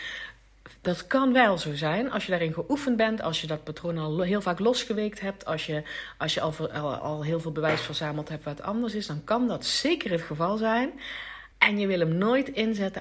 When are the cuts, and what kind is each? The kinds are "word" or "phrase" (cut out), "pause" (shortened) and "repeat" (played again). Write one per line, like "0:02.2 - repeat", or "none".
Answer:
0:11.5 - pause